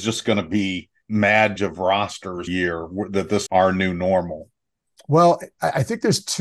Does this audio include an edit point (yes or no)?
yes